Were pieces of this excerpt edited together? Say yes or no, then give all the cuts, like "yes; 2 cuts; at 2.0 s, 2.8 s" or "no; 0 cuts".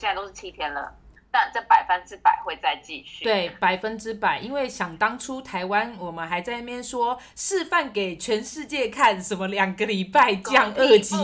no; 0 cuts